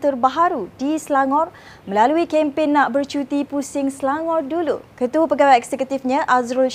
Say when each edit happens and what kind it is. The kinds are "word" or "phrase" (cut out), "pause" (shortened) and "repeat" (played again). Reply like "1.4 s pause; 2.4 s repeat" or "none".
4.9 s pause